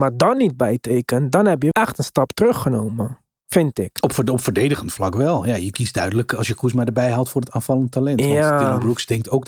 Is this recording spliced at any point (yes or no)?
yes